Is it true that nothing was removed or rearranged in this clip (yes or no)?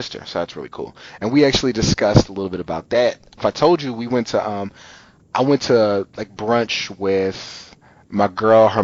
no